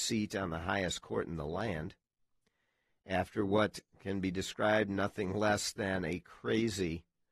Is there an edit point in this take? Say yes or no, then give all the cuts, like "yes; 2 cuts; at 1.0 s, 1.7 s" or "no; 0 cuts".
no; 0 cuts